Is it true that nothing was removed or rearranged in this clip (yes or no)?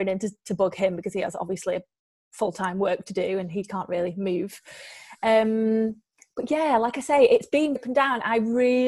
no